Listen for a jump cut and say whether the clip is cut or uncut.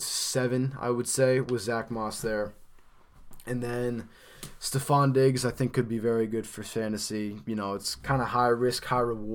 uncut